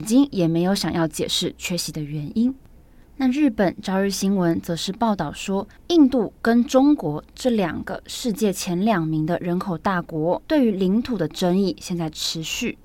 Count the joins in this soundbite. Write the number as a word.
three